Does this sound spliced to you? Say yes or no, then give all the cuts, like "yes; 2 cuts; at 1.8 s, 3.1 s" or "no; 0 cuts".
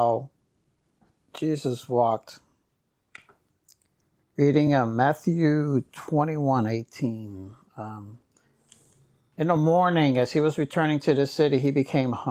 no; 0 cuts